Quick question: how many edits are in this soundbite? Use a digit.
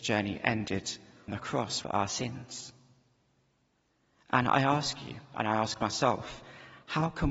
2